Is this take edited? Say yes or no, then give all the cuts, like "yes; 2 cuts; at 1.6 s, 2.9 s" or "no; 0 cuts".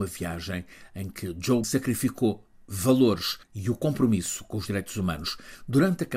yes; 1 cut; at 1.6 s